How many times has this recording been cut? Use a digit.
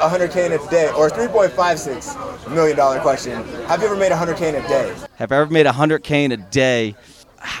1